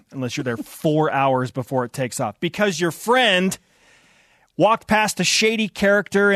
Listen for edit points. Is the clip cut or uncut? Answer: uncut